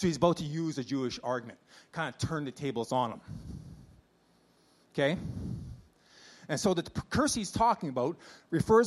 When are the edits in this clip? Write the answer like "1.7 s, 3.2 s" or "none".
none